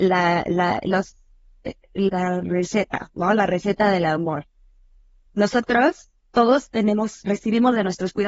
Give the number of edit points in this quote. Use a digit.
1